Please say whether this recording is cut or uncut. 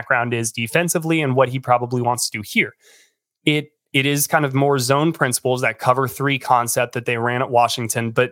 uncut